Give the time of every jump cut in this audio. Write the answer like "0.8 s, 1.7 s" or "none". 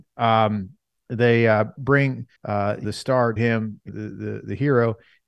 0.9 s, 2.4 s, 2.8 s, 3.4 s, 3.9 s